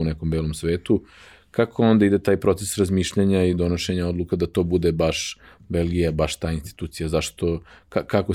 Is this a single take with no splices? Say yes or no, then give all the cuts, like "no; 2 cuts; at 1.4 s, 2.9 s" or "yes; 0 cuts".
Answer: yes; 0 cuts